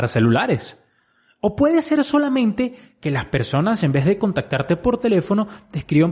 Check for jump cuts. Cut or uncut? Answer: uncut